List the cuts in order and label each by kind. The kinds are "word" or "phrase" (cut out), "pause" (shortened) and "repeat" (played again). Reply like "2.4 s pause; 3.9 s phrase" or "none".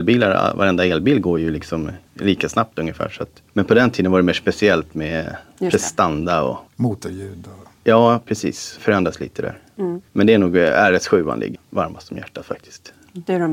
2.1 s pause; 3.5 s pause; 6.7 s pause; 8.8 s phrase; 10.1 s pause; 11.5 s word